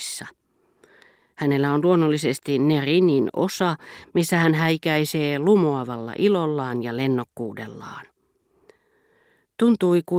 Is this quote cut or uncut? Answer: uncut